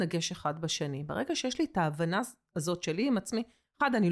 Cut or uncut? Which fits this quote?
uncut